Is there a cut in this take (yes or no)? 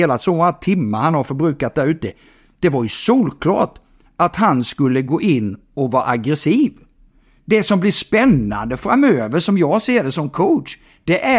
no